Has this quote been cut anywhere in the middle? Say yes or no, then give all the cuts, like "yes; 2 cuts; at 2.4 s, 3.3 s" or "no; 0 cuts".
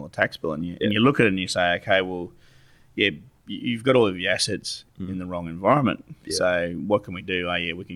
no; 0 cuts